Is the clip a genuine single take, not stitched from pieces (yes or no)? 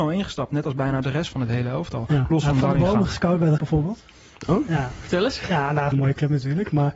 no